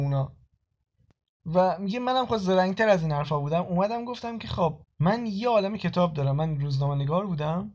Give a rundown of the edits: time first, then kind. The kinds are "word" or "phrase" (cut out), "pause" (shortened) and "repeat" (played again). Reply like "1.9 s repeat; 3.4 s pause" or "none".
4.8 s pause